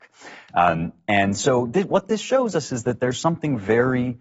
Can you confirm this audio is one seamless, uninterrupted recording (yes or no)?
yes